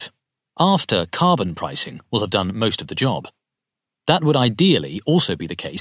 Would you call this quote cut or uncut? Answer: uncut